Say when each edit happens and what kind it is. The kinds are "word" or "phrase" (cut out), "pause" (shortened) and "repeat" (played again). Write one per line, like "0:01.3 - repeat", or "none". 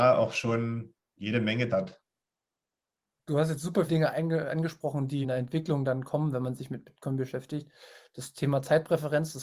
0:01.7 - word
0:03.9 - word
0:05.2 - word